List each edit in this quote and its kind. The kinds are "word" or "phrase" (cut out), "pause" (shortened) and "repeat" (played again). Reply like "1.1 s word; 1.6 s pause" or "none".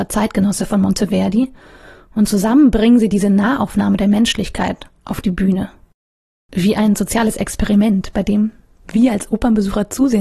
5.0 s pause